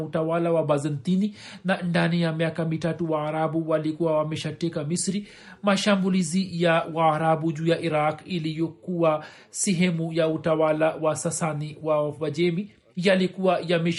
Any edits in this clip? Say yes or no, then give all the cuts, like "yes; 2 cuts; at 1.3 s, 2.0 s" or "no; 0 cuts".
yes; 1 cut; at 12.9 s